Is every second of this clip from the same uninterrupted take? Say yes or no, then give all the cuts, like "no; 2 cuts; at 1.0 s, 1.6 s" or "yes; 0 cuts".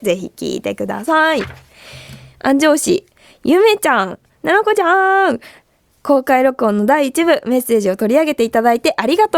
yes; 0 cuts